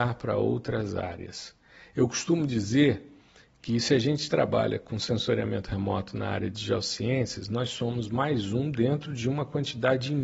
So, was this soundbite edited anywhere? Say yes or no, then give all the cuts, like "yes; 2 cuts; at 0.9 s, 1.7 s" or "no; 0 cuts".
no; 0 cuts